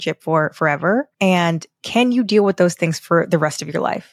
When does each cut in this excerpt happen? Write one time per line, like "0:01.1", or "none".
0:01.1